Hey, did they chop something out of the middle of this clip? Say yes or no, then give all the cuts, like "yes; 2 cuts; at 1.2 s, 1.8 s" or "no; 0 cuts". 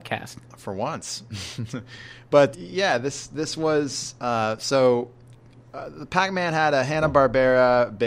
yes; 1 cut; at 2.5 s